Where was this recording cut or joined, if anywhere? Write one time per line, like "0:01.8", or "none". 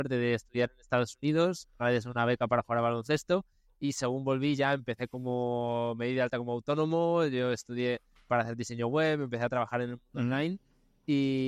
0:08.3